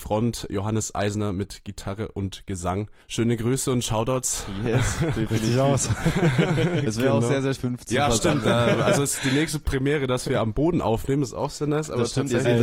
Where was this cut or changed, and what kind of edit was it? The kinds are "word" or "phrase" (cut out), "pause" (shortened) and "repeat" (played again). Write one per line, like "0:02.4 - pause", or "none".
0:03.0 - pause
0:07.6 - phrase